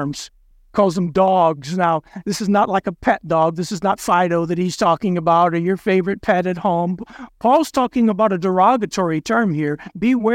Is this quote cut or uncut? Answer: uncut